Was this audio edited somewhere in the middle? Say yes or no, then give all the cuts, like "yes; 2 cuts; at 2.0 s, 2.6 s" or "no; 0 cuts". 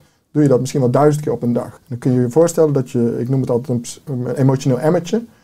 yes; 1 cut; at 1.8 s